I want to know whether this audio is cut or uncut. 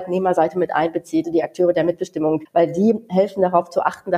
cut